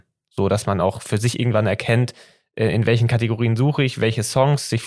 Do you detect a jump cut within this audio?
no; 0 cuts

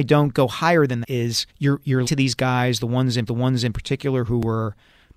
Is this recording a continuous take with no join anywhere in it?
no; 4 cuts; at 1.0 s, 1.5 s, 2.1 s, 3.3 s

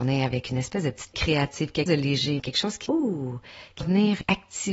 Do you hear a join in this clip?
yes; 5 cuts; at 1.1 s, 1.9 s, 2.4 s, 2.9 s, 3.8 s

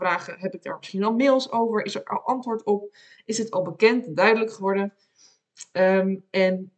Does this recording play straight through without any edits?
yes; 0 cuts

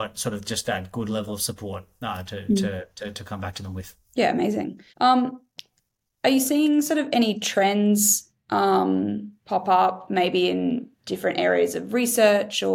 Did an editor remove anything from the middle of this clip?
yes; 4 cuts; at 4.0 s, 4.9 s, 9.4 s, 10.9 s

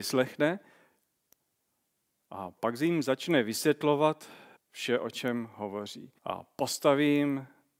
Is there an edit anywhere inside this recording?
yes; 2 cuts; at 4.6 s, 6.2 s

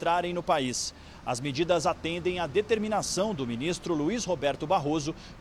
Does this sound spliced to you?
no; 0 cuts

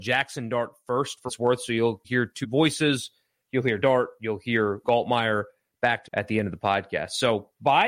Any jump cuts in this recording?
yes; 6 cuts; at 1.3 s, 2.0 s, 2.4 s, 3.8 s, 4.8 s, 6.0 s

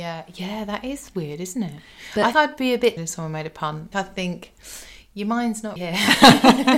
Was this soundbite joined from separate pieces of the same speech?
yes; 4 cuts; at 2.3 s, 3.0 s, 3.9 s, 5.8 s

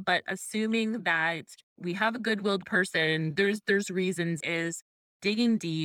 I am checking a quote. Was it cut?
yes; 2 cuts; at 1.6 s, 4.4 s

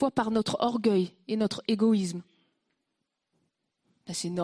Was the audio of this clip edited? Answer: no; 0 cuts

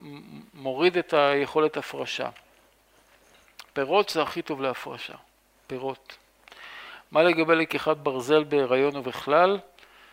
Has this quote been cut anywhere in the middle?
no; 0 cuts

